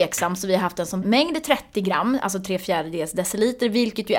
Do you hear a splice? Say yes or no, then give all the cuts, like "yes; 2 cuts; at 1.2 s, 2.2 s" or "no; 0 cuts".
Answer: yes; 1 cut; at 1.0 s